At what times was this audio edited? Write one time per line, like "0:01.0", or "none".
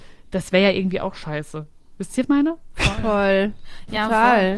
0:02.2